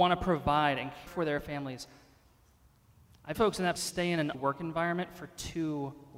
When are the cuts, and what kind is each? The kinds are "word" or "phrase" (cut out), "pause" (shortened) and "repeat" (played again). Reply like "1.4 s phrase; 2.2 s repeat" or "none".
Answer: 1.1 s word; 3.3 s word; 3.8 s word; 4.3 s word